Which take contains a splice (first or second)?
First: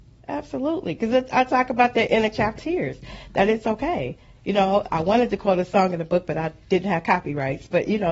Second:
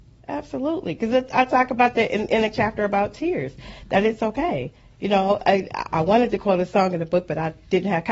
first